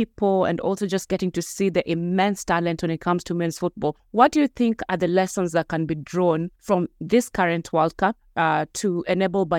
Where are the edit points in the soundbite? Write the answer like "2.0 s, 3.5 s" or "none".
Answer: 4.0 s, 6.6 s